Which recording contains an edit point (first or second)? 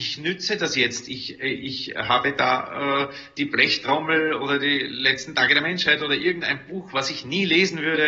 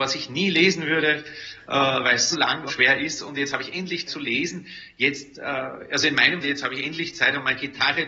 second